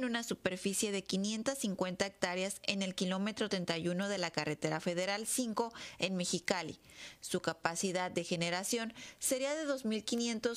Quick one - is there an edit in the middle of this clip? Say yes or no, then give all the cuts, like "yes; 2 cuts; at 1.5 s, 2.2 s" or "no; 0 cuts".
no; 0 cuts